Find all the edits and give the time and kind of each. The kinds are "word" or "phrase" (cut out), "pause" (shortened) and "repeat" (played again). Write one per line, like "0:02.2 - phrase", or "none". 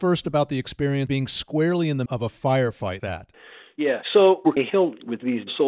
0:01.1 - word
0:02.1 - word
0:03.0 - word
0:04.6 - word